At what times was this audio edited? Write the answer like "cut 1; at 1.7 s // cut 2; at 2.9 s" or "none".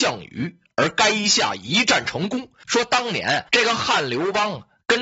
cut 1; at 3.5 s